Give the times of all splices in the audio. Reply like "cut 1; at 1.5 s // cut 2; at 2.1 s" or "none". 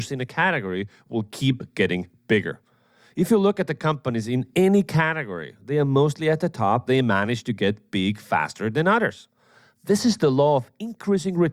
cut 1; at 6.9 s